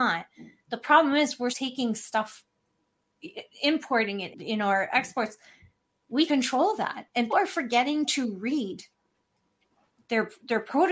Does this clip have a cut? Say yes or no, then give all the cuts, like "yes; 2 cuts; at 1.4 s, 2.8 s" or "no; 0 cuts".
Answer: yes; 4 cuts; at 1.5 s, 4.3 s, 6.3 s, 7.3 s